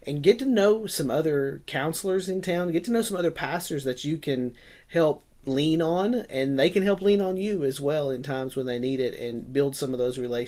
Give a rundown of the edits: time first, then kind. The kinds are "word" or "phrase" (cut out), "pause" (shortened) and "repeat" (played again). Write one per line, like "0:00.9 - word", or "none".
0:05.3 - pause